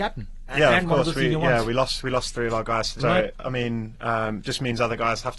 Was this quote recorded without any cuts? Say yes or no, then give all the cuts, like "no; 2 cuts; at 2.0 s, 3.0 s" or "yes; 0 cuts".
no; 1 cut; at 3.0 s